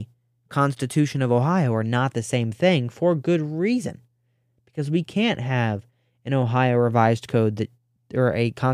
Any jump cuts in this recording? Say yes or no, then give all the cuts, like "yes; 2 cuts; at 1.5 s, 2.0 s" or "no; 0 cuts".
no; 0 cuts